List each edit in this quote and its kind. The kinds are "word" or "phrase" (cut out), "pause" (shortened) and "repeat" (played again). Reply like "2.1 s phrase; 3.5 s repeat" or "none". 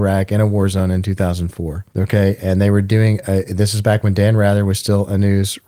1.9 s pause